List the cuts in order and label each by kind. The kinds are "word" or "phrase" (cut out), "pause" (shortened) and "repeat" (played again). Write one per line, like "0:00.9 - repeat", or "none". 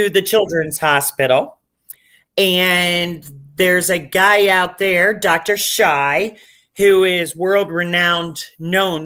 none